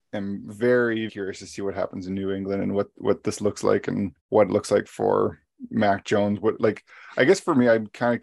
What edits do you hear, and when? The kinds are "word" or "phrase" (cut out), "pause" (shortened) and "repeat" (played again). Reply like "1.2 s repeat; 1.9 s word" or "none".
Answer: 1.1 s word; 4.2 s pause